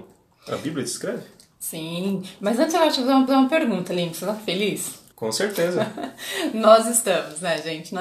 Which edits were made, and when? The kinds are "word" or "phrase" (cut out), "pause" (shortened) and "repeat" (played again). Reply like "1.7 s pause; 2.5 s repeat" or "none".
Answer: 3.3 s repeat; 5.1 s pause